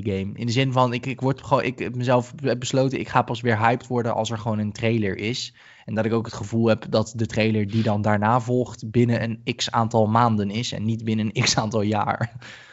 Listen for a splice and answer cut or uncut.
uncut